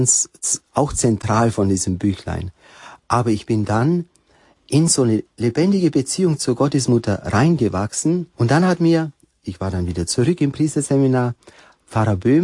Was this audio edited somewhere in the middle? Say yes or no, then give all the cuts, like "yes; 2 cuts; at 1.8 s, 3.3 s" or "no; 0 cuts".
yes; 1 cut; at 8.3 s